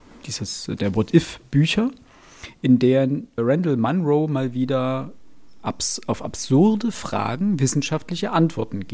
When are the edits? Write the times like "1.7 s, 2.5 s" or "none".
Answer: 3.4 s